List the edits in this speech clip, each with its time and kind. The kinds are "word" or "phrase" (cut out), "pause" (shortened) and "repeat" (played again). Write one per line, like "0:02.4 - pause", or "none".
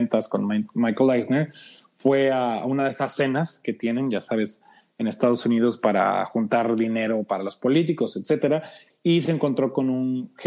none